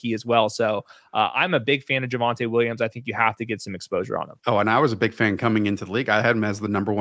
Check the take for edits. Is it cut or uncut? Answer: cut